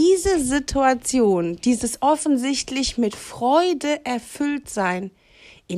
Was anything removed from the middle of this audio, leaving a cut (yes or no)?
no